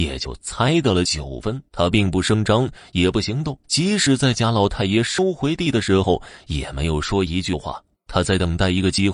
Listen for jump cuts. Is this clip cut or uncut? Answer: cut